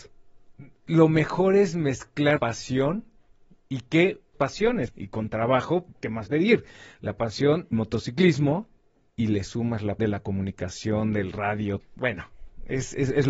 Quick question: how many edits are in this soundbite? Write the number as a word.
eight